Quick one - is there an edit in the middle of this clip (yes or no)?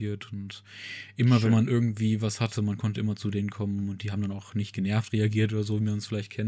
no